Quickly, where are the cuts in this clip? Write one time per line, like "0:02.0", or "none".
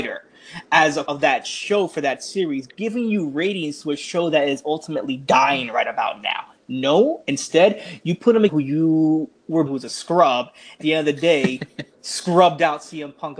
0:01.1
0:08.5
0:09.7
0:10.8